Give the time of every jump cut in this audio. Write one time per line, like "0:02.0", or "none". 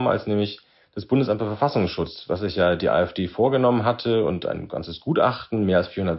none